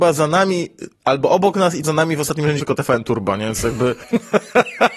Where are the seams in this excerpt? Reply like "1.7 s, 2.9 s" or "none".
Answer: 0.9 s, 1.8 s, 2.6 s